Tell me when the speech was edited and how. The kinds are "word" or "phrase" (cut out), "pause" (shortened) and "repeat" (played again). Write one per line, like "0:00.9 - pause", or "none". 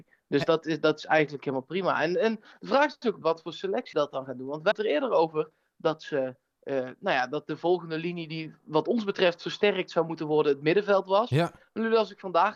0:03.2 - phrase
0:03.9 - word
0:04.7 - word